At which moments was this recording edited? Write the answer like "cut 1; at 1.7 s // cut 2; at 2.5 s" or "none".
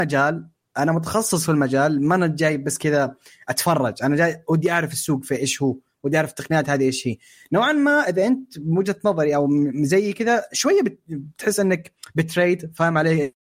none